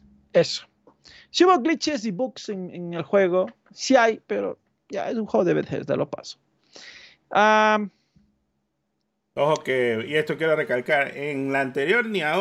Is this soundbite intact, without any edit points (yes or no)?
yes